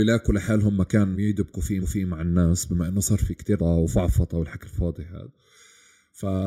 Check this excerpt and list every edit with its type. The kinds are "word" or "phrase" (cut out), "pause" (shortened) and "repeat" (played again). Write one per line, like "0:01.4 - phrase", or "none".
0:01.1 - word
0:01.8 - repeat
0:03.2 - phrase
0:03.6 - word